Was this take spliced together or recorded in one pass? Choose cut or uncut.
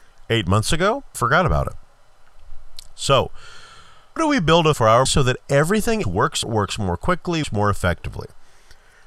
cut